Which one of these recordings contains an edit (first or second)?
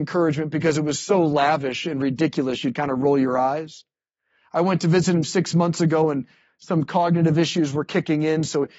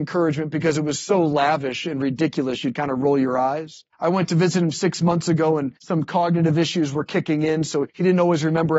second